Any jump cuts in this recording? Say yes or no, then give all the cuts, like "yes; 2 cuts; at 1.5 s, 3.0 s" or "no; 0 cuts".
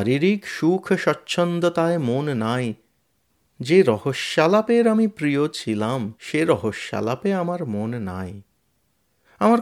yes; 1 cut; at 6.2 s